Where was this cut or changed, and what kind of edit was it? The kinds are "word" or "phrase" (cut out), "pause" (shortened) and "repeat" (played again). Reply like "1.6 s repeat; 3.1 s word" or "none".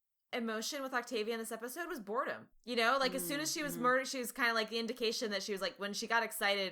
2.5 s pause

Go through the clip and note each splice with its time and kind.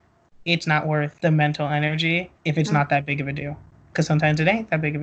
1.2 s pause; 2.4 s pause

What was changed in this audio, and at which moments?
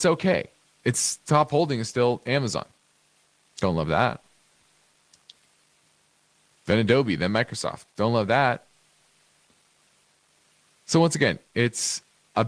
none

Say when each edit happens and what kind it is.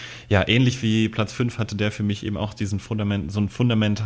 none

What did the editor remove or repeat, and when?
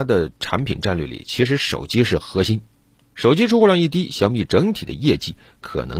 none

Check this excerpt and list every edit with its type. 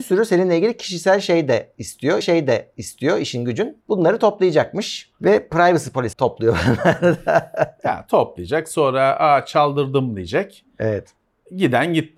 2.2 s repeat; 3.8 s pause; 5.1 s pause; 6.1 s word

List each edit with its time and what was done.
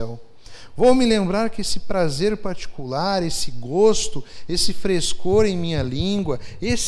none

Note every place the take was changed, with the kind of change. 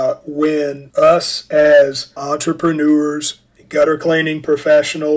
2.2 s phrase

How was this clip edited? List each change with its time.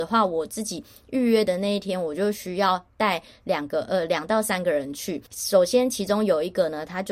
5.3 s pause

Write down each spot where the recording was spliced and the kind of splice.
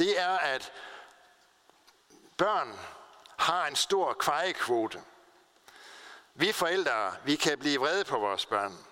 none

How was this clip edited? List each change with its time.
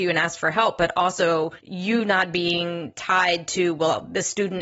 1.6 s pause

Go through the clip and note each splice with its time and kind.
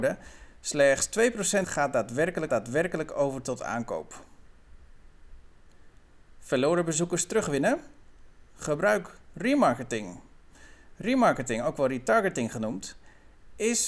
1.6 s phrase; 2.5 s repeat

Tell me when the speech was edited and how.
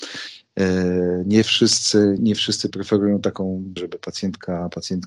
2.2 s word; 2.7 s word; 3.8 s word

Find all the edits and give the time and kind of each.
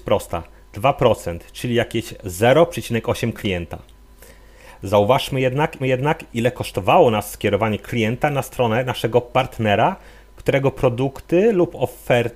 5.8 s repeat

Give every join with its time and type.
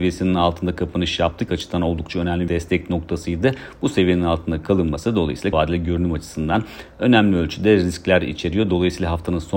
1.5 s phrase; 2.5 s word; 5.5 s word

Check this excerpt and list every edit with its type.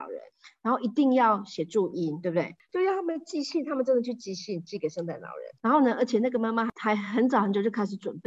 5.6 s pause

